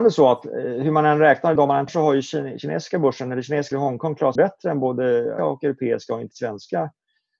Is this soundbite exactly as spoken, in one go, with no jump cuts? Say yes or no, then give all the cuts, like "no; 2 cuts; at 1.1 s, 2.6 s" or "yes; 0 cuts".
no; 6 cuts; at 1.6 s, 1.9 s, 3.7 s, 4.4 s, 5.4 s, 6.3 s